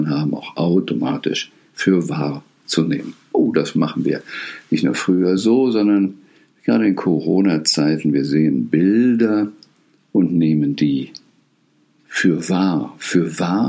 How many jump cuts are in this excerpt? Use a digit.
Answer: 0